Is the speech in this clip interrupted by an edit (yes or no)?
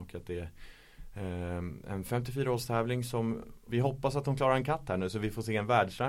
yes